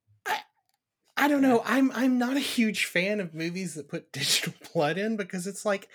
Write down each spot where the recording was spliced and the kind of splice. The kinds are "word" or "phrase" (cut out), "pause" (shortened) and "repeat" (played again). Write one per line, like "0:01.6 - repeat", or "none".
none